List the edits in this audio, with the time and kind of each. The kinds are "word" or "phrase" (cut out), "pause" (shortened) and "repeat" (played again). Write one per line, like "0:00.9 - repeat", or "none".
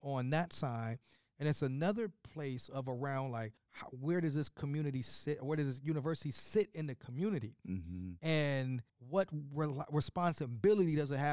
0:03.6 - pause
0:08.9 - pause